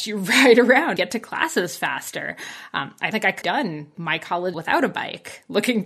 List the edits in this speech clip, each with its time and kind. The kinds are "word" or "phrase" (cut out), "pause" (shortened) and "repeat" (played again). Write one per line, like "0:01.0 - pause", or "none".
0:01.0 - word
0:03.1 - word
0:03.4 - word
0:03.9 - word
0:04.5 - word